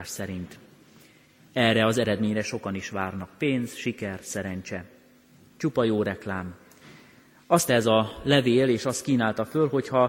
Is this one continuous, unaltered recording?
no; 1 cut; at 7.7 s

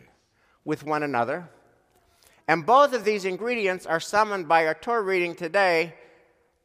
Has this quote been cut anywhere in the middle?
no; 0 cuts

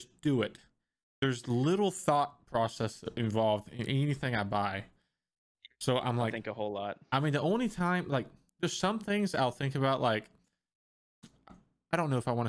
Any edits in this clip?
no; 0 cuts

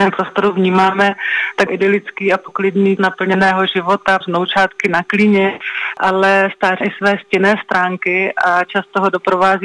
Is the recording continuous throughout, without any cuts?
no; 4 cuts; at 1.7 s, 3.0 s, 4.2 s, 6.8 s

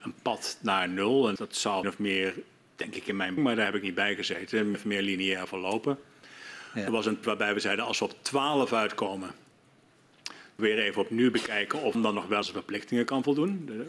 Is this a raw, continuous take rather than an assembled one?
no; 8 cuts; at 1.4 s, 1.8 s, 3.4 s, 4.7 s, 7.2 s, 10.6 s, 11.9 s, 12.4 s

